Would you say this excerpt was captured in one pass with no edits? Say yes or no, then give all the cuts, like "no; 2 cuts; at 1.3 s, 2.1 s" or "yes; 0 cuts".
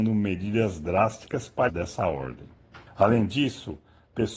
no; 2 cuts; at 1.7 s, 2.9 s